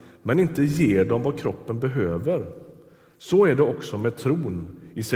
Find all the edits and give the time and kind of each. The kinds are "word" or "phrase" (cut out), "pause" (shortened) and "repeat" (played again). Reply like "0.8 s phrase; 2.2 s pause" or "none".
none